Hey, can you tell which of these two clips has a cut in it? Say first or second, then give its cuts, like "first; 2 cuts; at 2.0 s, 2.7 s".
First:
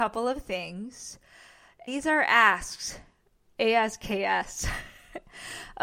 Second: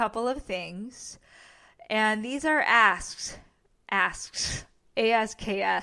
first; 2 cuts; at 1.9 s, 3.4 s